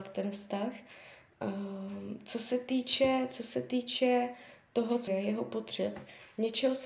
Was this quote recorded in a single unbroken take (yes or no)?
no